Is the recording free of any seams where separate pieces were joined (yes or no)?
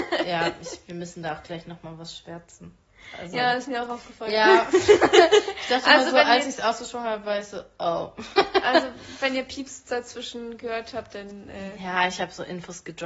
yes